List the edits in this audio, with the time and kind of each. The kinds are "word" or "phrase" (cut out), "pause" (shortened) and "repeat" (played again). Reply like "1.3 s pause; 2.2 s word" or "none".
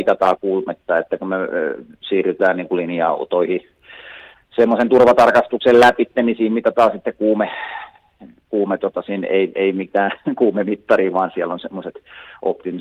none